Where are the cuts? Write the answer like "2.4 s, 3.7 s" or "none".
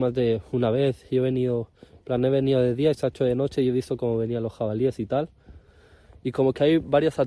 none